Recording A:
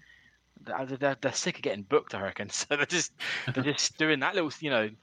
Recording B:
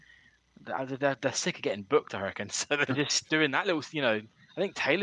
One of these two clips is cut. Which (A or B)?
B